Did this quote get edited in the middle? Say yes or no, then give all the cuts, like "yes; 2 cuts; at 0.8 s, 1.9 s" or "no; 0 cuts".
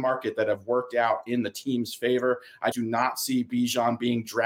yes; 1 cut; at 2.7 s